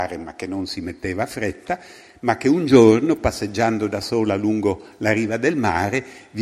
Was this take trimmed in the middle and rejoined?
no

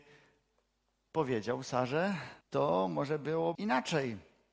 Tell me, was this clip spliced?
yes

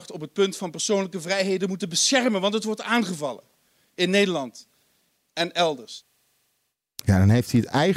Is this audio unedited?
yes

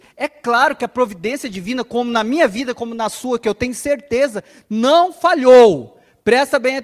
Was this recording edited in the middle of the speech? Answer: no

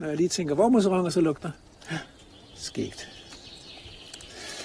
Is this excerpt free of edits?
yes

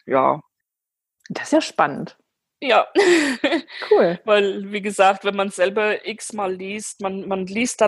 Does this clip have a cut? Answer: no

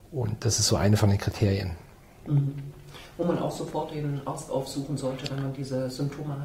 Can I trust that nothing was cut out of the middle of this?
yes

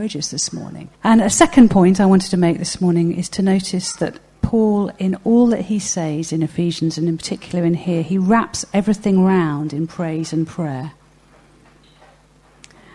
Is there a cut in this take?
yes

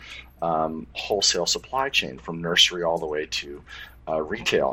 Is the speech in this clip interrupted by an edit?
yes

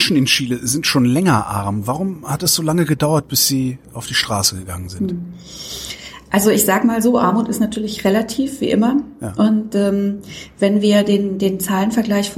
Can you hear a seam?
no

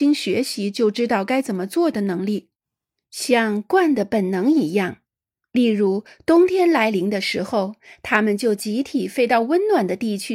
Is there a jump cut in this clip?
no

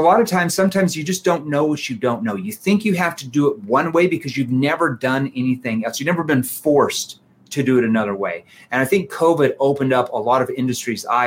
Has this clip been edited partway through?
no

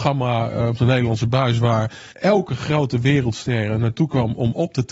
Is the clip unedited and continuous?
no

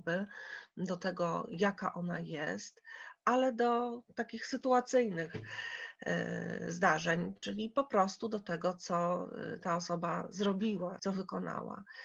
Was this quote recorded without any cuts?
no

